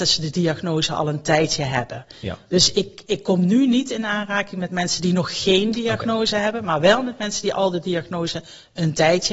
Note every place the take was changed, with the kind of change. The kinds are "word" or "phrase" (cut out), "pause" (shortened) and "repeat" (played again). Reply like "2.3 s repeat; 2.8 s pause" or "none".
none